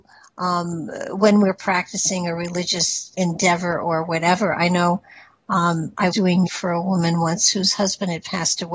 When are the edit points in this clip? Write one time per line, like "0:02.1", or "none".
0:03.1
0:06.1
0:06.5